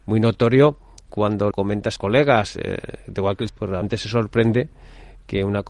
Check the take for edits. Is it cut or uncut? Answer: cut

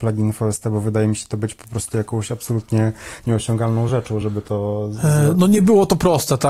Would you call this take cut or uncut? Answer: uncut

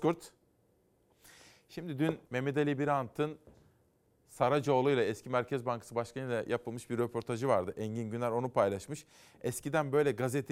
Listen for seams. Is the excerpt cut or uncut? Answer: cut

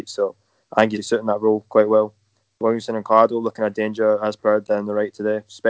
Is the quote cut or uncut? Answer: cut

